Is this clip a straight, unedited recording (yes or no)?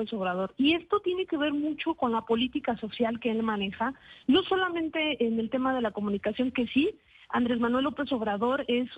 yes